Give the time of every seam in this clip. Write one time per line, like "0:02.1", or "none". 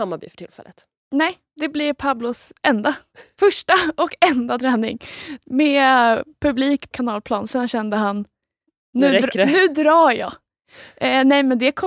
0:06.9